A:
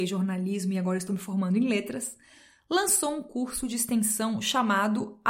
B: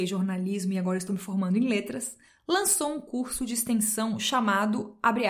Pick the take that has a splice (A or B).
B